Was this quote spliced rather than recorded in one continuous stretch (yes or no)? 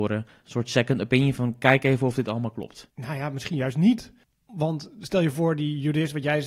no